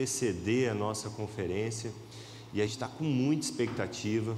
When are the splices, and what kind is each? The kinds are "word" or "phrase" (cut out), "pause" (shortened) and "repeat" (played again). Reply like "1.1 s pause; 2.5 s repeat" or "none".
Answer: 2.7 s word